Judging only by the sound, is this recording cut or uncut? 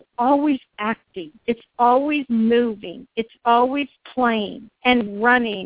cut